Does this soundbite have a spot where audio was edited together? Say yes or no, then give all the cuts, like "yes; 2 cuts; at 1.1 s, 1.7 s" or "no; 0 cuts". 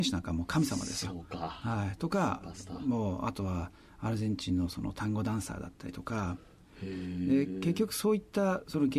no; 0 cuts